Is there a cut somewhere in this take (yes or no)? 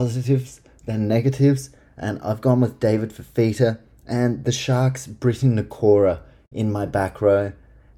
no